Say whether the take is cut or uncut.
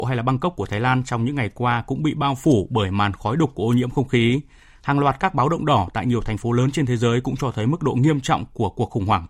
uncut